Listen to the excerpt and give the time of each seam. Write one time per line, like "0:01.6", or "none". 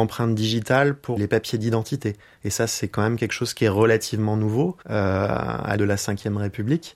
0:01.2
0:04.8
0:05.8